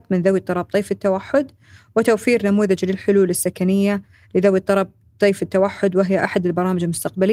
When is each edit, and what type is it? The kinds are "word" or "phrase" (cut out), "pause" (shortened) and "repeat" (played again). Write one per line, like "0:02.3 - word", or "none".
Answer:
none